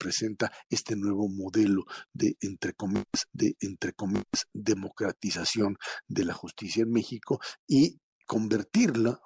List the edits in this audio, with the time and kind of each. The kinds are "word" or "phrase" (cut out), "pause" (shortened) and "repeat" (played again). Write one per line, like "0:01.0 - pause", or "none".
0:03.3 - repeat